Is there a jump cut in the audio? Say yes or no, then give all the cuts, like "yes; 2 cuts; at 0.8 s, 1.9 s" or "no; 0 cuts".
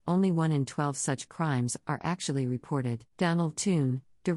yes; 1 cut; at 3.1 s